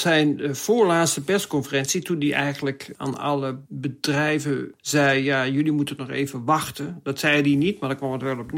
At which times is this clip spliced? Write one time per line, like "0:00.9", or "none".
none